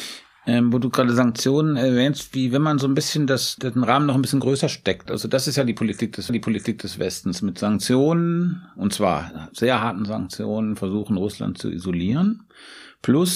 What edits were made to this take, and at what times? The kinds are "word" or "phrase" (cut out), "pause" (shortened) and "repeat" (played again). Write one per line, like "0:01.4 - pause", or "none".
0:03.6 - word
0:05.1 - phrase
0:06.3 - repeat